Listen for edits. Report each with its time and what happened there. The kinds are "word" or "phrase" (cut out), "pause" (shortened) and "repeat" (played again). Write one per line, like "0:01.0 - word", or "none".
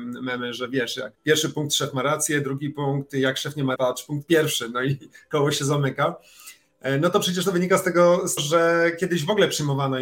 0:01.1 - pause
0:03.8 - word
0:08.4 - word